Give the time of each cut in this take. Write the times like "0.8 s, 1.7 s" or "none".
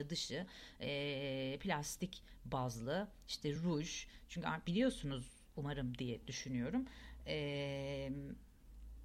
none